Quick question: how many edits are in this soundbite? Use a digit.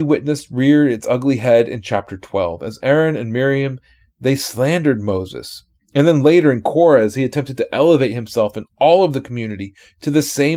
0